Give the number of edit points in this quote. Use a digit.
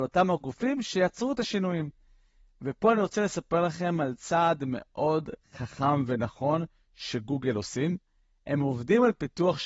0